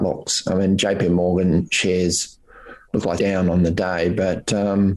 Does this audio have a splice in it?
yes; 1 cut; at 3.2 s

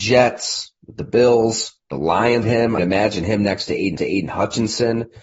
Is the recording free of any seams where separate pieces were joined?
no; 4 cuts; at 1.8 s, 2.4 s, 2.8 s, 4.0 s

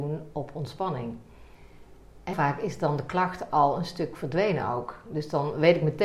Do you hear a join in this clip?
yes; 1 cut; at 2.3 s

